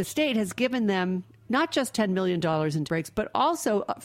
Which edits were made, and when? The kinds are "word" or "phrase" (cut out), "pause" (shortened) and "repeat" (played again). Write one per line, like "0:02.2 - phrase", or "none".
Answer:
0:01.3 - pause
0:02.9 - word